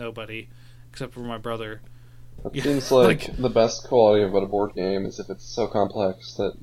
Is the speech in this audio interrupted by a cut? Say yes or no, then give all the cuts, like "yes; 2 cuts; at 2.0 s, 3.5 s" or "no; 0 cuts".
no; 0 cuts